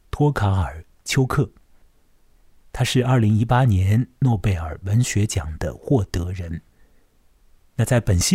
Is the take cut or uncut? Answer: uncut